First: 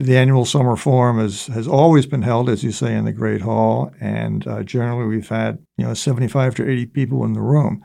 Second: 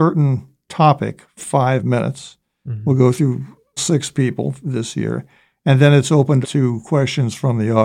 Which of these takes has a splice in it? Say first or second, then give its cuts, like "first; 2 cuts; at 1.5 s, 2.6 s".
second; 3 cuts; at 1.4 s, 3.8 s, 6.4 s